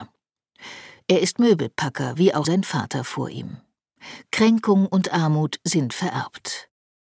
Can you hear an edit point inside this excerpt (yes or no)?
yes